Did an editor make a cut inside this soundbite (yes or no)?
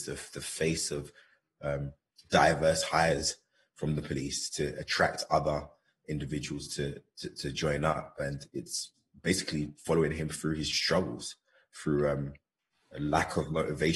no